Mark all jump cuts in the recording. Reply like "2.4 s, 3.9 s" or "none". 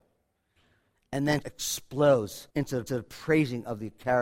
1.4 s, 2.5 s, 2.9 s